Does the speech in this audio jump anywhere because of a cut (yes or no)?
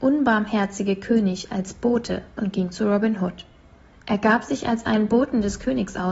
no